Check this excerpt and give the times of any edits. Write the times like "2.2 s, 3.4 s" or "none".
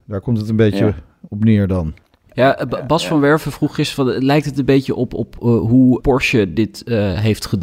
6.0 s

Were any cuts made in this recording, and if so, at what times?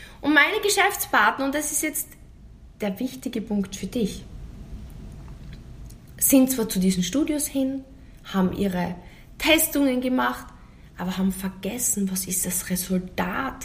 none

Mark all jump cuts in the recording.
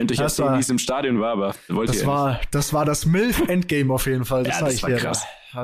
1.7 s

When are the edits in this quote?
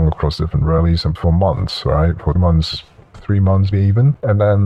1.2 s, 2.4 s, 3.1 s, 3.7 s

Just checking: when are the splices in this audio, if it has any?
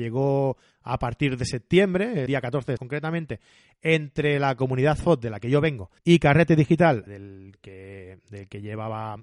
2.3 s, 2.8 s, 6.0 s, 7.1 s

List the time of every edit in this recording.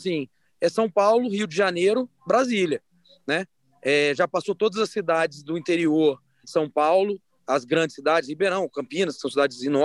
6.4 s

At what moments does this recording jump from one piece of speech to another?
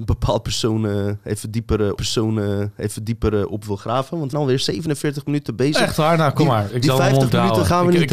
2.0 s, 4.3 s

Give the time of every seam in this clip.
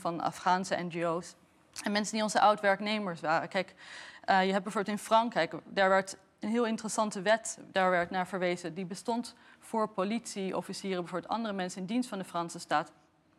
none

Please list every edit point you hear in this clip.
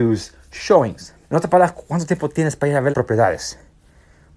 1.2 s, 2.9 s

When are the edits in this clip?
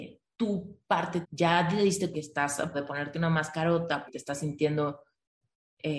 1.2 s, 2.1 s, 2.7 s, 4.1 s

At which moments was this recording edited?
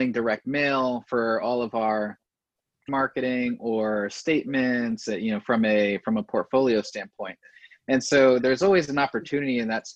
2.9 s

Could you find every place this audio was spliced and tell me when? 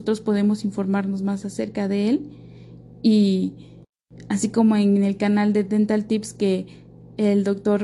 none

